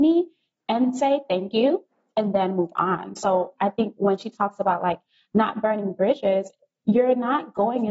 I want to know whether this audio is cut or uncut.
uncut